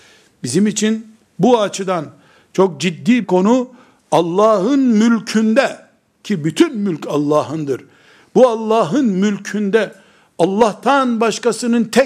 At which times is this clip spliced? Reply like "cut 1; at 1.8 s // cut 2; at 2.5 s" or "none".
cut 1; at 3.2 s